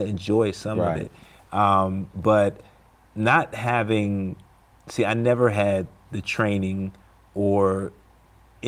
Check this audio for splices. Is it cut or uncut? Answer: uncut